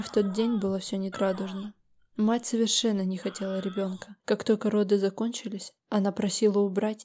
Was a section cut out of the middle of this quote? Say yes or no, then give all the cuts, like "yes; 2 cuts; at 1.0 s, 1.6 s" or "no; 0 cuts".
yes; 3 cuts; at 1.1 s, 4.2 s, 5.8 s